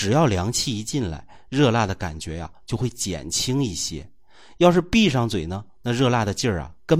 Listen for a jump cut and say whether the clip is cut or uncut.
uncut